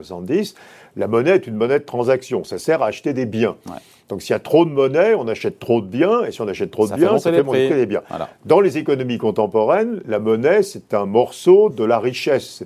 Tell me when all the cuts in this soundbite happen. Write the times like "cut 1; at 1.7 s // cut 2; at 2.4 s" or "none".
none